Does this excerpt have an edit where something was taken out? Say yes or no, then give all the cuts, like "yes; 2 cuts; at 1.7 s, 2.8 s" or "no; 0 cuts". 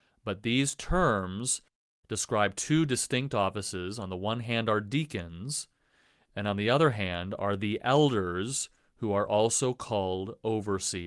no; 0 cuts